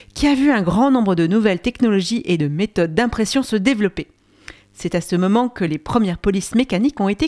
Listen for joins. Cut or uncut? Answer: uncut